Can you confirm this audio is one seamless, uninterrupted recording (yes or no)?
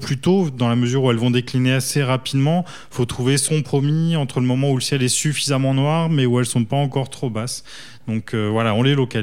no